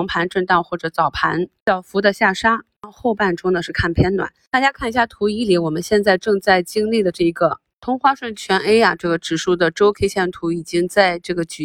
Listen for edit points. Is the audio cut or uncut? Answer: uncut